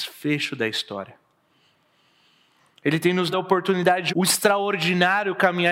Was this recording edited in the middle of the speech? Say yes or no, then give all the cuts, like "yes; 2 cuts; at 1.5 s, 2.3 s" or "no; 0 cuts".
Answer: yes; 2 cuts; at 3.3 s, 4.1 s